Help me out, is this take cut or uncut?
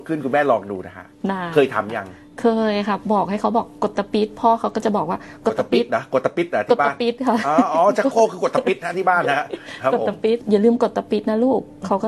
uncut